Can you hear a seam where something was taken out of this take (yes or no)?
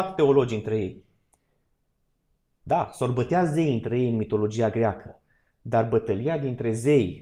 no